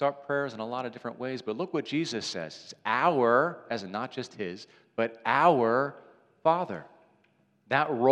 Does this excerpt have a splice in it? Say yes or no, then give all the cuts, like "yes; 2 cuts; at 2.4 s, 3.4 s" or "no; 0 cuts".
no; 0 cuts